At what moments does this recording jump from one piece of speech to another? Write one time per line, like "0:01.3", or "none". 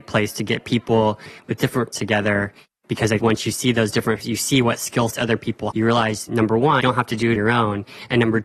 0:01.9
0:03.2
0:04.2
0:05.1
0:05.7
0:06.3
0:06.8
0:07.4